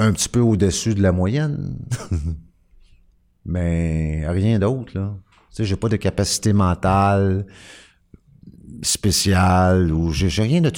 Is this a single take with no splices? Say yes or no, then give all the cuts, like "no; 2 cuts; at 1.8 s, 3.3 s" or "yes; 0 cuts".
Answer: yes; 0 cuts